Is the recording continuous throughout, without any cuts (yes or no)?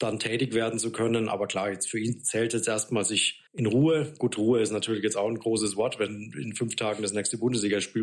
no